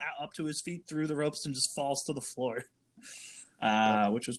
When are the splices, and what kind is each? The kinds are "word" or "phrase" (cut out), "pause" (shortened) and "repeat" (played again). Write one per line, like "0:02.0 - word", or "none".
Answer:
none